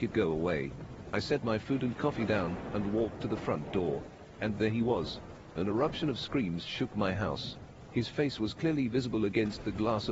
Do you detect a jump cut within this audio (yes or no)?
no